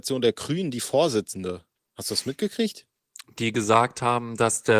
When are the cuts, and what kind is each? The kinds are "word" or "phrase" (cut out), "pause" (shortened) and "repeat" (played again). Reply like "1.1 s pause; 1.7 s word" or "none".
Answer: none

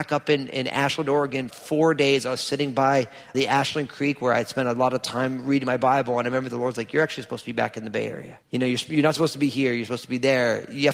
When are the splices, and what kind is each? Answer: 1.5 s phrase; 3.3 s word; 8.4 s pause

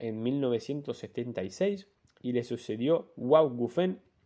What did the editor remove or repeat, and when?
none

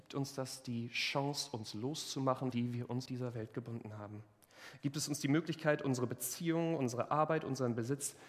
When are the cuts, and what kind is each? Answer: 2.5 s phrase; 3.1 s word

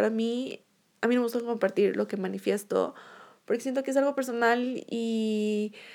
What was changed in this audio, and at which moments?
none

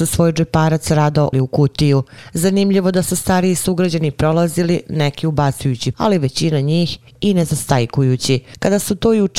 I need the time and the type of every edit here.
1.3 s word; 5.9 s word

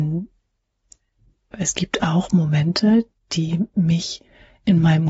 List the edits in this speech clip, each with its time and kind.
none

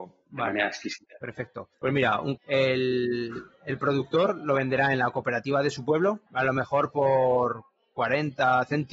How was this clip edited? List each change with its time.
1.7 s pause; 2.4 s phrase; 6.3 s pause

